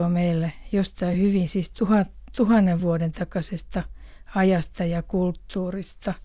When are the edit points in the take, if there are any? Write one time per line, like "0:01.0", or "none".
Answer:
none